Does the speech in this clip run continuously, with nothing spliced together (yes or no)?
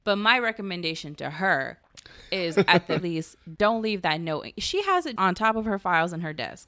no